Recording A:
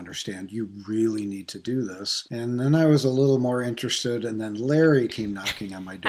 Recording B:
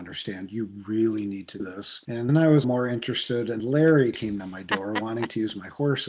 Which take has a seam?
B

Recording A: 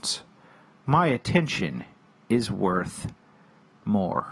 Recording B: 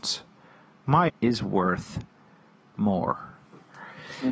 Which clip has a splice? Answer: B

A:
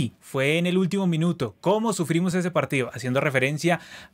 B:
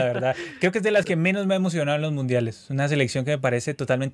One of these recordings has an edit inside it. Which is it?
B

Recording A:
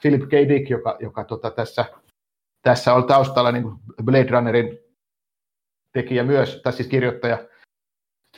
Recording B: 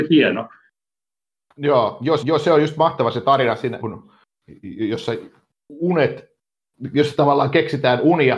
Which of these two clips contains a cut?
B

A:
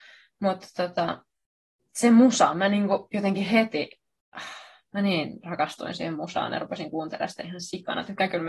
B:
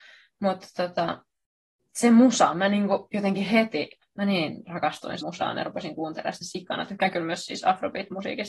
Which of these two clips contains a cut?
B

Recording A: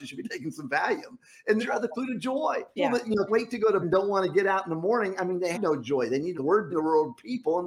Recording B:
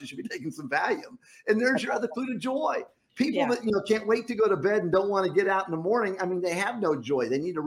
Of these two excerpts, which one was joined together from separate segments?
A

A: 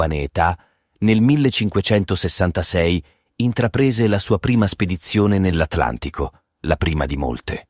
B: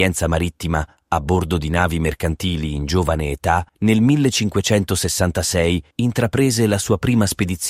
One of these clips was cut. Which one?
B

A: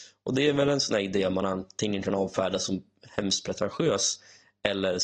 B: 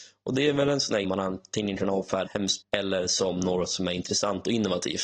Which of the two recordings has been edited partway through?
B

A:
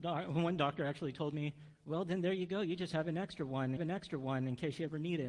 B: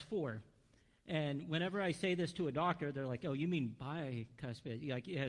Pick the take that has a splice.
A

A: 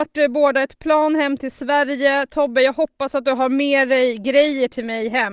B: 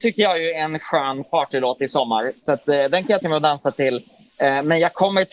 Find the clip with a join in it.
B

